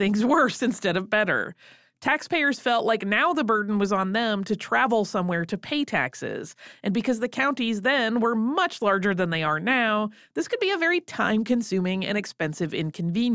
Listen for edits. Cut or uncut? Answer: uncut